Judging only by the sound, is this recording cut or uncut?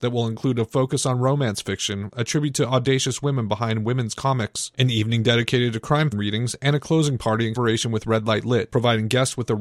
cut